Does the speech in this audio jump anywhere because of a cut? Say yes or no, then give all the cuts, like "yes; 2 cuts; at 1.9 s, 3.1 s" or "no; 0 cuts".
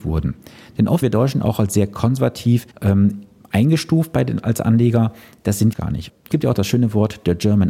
yes; 4 cuts; at 1.0 s, 2.7 s, 5.7 s, 6.3 s